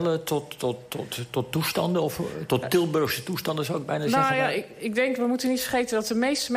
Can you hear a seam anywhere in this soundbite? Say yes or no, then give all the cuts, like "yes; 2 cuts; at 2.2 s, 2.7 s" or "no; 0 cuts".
no; 0 cuts